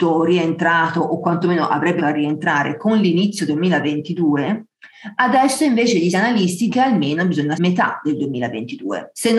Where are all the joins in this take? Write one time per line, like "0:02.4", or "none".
0:02.0
0:03.5
0:06.1
0:06.7
0:07.5